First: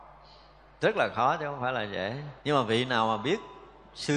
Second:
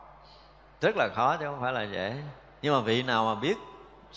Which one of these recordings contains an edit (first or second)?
first